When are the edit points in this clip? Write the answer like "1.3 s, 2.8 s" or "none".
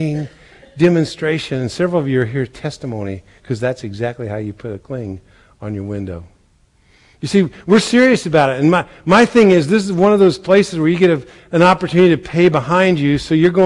none